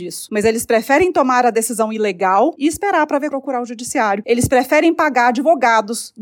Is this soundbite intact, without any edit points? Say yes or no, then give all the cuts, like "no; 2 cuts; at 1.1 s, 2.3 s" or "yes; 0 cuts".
no; 1 cut; at 3.3 s